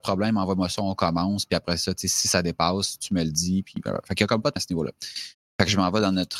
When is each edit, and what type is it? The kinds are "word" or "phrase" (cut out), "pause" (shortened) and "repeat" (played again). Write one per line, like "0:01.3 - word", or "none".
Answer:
0:04.6 - word